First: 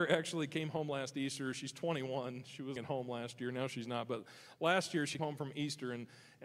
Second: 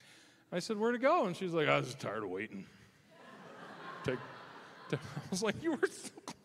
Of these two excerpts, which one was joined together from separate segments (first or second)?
first